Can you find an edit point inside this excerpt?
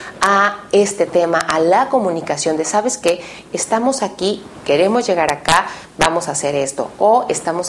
no; 0 cuts

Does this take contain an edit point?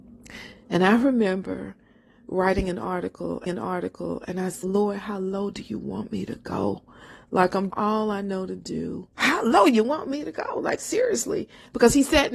yes; 4 cuts; at 3.5 s, 4.6 s, 7.7 s, 9.1 s

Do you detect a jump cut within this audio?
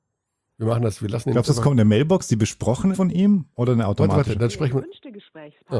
yes; 1 cut; at 2.9 s

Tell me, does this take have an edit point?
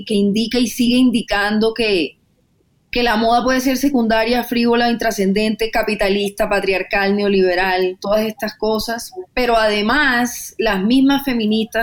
no; 0 cuts

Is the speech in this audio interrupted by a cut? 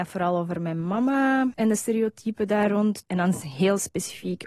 no; 0 cuts

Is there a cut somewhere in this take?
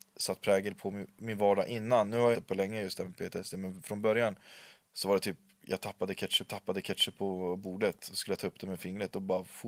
yes; 2 cuts; at 2.3 s, 6.5 s

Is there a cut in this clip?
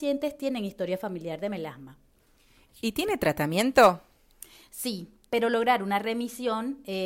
no; 0 cuts

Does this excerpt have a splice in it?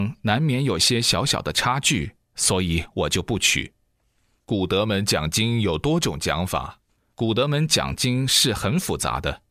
no; 0 cuts

